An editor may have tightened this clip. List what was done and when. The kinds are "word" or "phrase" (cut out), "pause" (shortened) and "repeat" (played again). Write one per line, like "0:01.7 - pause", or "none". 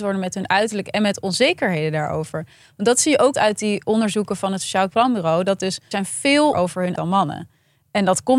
0:03.3 - word
0:04.9 - word
0:05.9 - word
0:06.5 - word
0:06.9 - word